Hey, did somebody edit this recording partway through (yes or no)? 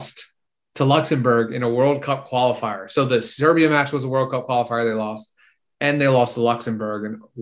no